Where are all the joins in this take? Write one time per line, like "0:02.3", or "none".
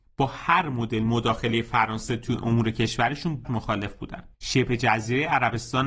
0:03.4
0:04.3